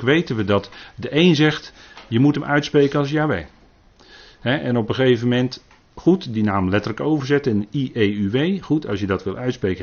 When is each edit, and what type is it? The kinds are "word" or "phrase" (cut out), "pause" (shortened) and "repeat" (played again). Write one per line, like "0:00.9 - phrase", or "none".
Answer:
none

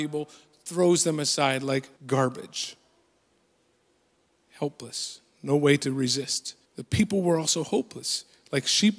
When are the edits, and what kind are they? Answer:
0:02.0 - pause
0:06.6 - pause

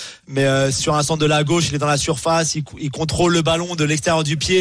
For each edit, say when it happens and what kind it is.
none

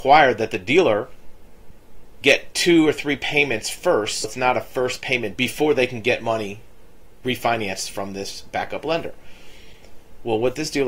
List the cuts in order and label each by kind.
0:04.2 - word
0:05.4 - word

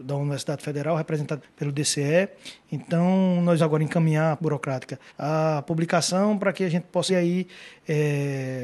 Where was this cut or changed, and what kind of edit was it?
0:01.4 - word
0:03.6 - word
0:04.4 - word
0:05.1 - pause
0:07.1 - word

